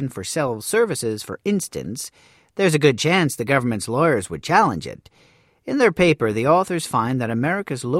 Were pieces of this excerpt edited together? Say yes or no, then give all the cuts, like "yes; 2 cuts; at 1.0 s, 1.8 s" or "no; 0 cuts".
no; 0 cuts